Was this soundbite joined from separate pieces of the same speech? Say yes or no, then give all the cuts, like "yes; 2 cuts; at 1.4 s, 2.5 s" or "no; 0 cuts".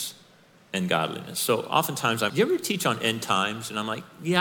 yes; 1 cut; at 2.3 s